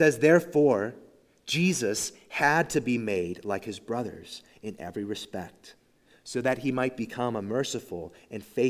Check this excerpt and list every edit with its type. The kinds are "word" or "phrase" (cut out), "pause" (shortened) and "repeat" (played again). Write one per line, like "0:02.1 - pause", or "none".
none